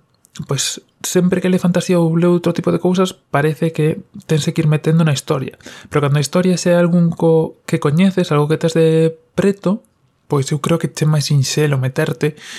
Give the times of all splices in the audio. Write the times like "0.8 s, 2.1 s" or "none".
none